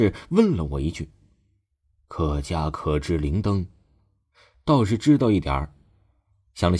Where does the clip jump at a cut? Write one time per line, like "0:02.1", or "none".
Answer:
none